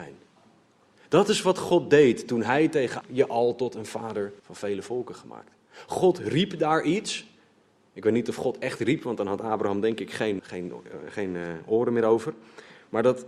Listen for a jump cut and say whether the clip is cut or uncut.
cut